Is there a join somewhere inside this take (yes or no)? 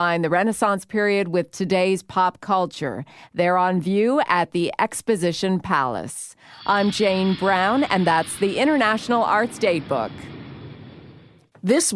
no